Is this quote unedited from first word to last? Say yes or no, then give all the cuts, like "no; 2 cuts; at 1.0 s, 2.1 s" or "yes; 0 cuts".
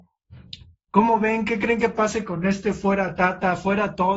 yes; 0 cuts